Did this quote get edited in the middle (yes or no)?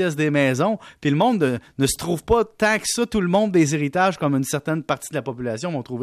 no